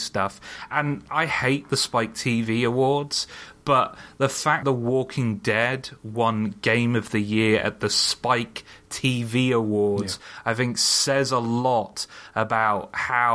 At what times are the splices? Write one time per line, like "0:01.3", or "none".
0:01.1
0:04.6